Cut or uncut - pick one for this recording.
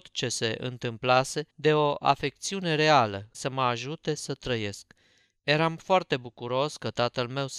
cut